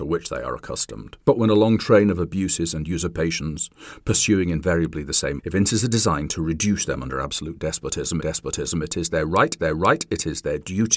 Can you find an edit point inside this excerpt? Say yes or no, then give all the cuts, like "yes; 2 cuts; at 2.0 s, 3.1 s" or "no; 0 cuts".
yes; 4 cuts; at 1.2 s, 5.4 s, 8.2 s, 9.6 s